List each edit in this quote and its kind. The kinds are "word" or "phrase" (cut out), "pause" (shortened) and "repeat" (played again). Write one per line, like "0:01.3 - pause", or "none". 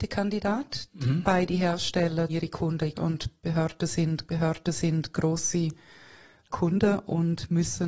0:02.3 - word
0:02.9 - word
0:04.3 - repeat